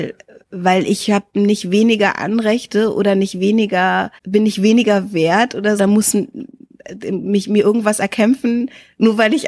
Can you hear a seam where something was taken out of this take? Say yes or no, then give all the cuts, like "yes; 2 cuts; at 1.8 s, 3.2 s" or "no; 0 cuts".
yes; 2 cuts; at 4.2 s, 5.8 s